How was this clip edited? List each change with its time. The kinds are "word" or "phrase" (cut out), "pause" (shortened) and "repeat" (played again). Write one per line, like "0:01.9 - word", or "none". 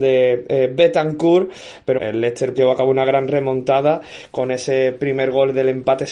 0:02.0 - word
0:02.6 - word